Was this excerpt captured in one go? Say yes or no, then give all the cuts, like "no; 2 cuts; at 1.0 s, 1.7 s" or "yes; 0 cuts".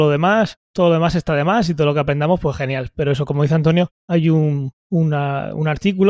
yes; 0 cuts